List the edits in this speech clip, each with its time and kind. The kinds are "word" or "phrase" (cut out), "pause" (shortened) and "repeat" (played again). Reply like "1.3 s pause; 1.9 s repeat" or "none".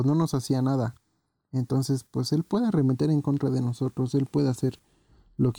none